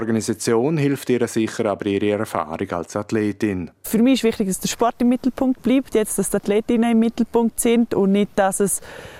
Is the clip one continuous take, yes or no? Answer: yes